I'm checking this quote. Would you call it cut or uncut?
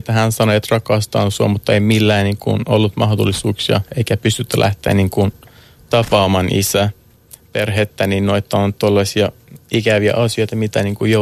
uncut